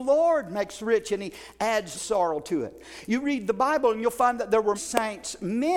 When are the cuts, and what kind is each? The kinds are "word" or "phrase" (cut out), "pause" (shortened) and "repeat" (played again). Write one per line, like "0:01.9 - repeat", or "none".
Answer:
0:02.0 - word
0:04.8 - word

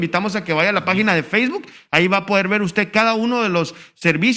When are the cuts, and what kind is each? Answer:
none

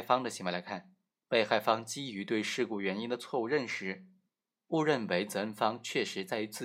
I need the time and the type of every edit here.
none

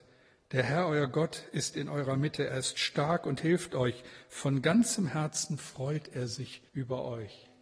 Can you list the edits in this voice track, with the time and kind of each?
0:06.7 - pause

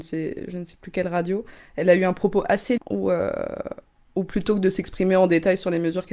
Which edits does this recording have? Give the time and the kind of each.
0:02.8 - word

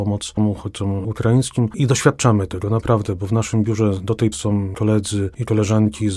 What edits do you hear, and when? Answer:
0:04.3 - word

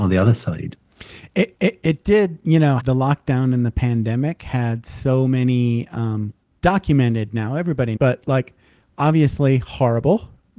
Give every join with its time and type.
0:01.5 - repeat
0:02.8 - phrase
0:06.4 - pause
0:08.0 - phrase

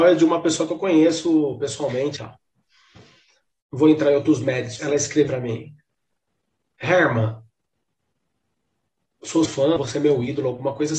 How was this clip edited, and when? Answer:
0:02.2 - word
0:04.8 - word
0:05.3 - word
0:09.5 - word
0:09.8 - word

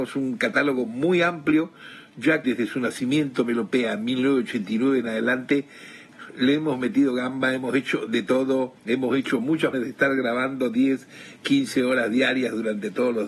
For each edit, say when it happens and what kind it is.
0:02.4 - word
0:08.8 - pause
0:09.7 - word

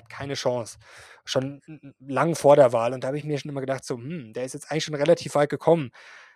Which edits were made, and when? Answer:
none

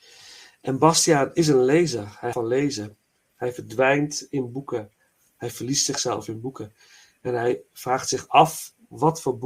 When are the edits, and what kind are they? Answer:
0:02.3 - word

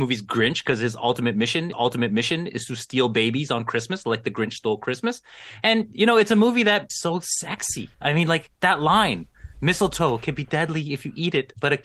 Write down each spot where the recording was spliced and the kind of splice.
0:01.7 - repeat
0:06.9 - phrase
0:07.9 - pause

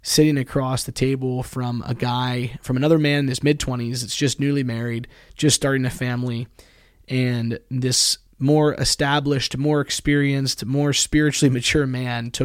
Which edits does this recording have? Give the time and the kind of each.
none

